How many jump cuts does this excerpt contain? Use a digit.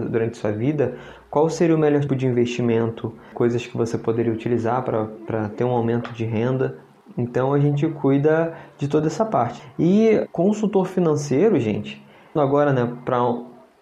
3